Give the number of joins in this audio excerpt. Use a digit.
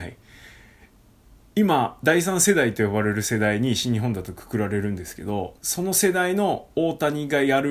1